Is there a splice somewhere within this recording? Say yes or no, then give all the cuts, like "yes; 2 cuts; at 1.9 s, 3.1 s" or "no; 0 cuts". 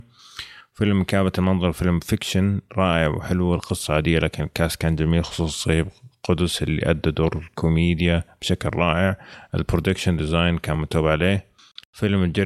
no; 0 cuts